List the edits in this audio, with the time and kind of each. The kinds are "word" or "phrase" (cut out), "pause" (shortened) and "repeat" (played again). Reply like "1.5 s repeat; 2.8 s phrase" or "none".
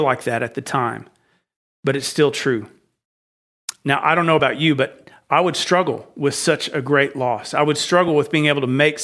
none